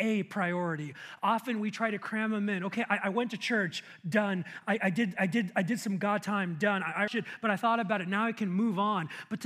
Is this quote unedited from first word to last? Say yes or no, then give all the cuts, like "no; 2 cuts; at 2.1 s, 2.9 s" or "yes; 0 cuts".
no; 2 cuts; at 5.2 s, 7.1 s